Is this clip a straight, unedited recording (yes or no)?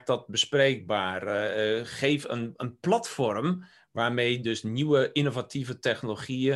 yes